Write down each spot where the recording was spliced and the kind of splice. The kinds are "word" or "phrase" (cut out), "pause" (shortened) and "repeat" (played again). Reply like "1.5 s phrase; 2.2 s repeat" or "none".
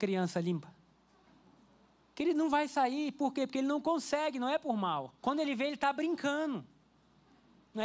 5.2 s pause

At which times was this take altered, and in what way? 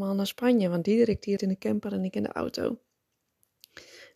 1.4 s word

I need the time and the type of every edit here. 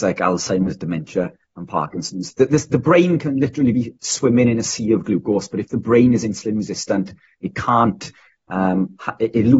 none

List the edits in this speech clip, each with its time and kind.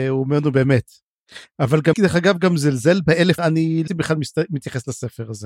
1.9 s word; 3.4 s phrase; 3.9 s word

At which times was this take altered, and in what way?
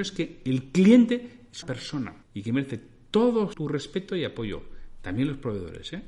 1.6 s word; 2.2 s pause; 3.5 s word

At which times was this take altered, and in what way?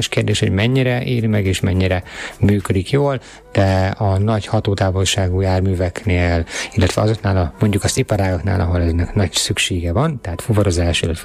none

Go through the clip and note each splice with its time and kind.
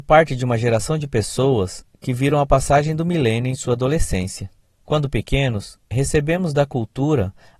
4.6 s pause

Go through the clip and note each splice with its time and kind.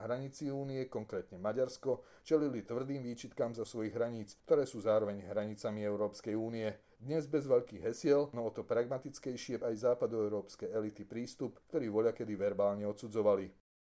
3.6 s phrase; 4.4 s pause; 6.8 s pause; 9.6 s word; 11.6 s pause

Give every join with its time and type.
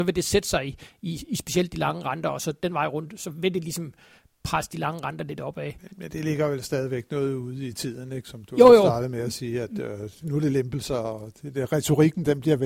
10.2 s word

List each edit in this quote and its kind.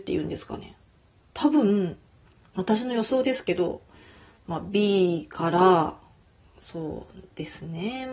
none

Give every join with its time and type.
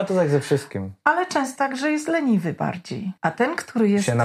1.6 s word; 3.2 s pause

